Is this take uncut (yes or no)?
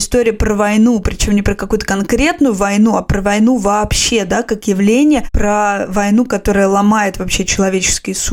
yes